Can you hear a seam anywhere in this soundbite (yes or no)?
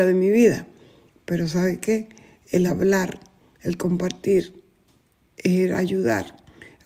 no